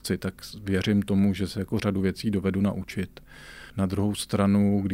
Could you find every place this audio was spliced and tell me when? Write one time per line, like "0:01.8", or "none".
0:03.7

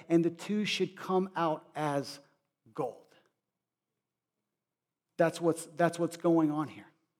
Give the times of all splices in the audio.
none

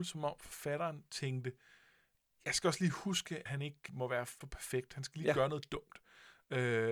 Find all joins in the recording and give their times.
0:03.5
0:03.9
0:04.4

